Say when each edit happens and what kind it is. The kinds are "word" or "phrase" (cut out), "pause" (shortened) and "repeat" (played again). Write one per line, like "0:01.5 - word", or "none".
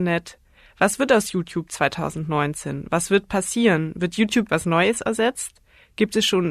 0:04.5 - word